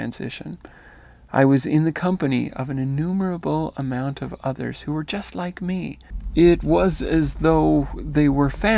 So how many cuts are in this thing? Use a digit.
0